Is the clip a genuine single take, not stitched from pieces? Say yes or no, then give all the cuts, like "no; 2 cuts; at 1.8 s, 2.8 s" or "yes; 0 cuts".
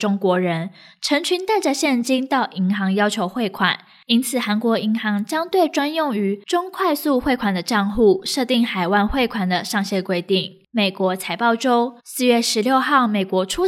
no; 1 cut; at 12.0 s